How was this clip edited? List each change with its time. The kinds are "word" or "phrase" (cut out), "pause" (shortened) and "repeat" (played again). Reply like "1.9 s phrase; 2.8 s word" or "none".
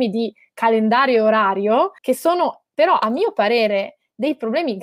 2.0 s pause

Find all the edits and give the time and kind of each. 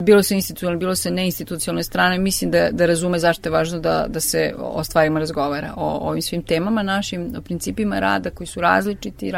none

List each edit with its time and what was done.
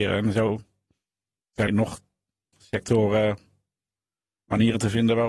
1.7 s word; 2.5 s word

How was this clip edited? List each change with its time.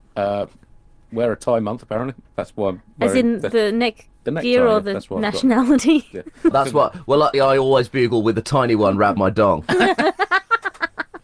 2.2 s pause; 6.5 s word; 7.3 s word; 9.2 s word

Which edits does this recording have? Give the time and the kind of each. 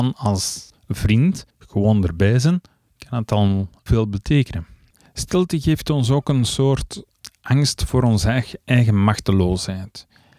1.5 s pause; 3.9 s word; 4.9 s pause

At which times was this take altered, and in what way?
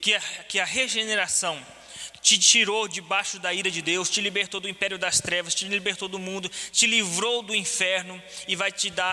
none

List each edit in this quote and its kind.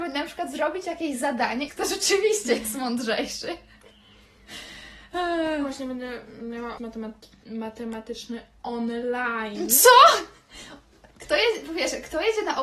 1.7 s word; 6.8 s word; 11.1 s pause

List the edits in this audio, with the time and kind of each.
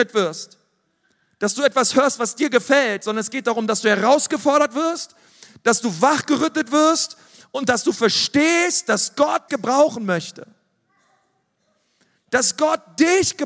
9.5 s word

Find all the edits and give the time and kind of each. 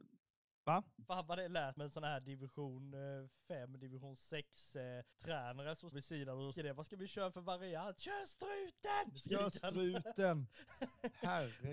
1.8 s word; 5.1 s pause; 5.9 s word; 6.6 s word

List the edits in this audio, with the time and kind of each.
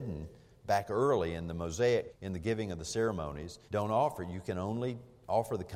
2.1 s word; 3.7 s pause

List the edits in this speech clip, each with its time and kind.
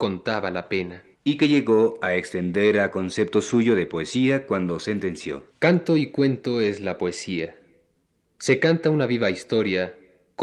1.1 s pause; 5.5 s pause

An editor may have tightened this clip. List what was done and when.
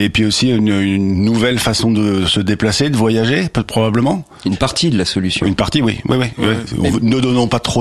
none

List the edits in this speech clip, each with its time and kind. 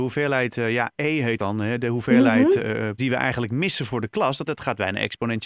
0.9 s word; 1.4 s word; 2.6 s word; 3.0 s word; 4.5 s word

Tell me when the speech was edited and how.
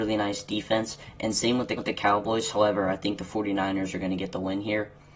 1.8 s repeat

